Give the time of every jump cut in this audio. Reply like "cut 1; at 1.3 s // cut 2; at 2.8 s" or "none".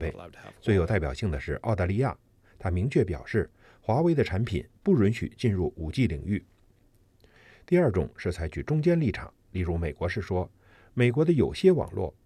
none